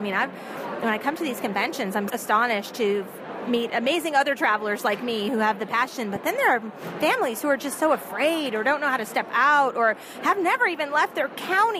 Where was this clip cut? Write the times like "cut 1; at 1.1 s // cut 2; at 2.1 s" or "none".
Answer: cut 1; at 2.1 s